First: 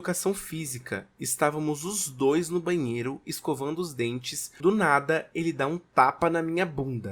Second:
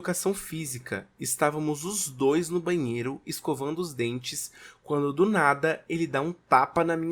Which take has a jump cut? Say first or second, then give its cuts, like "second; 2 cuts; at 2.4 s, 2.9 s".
first; 1 cut; at 4.6 s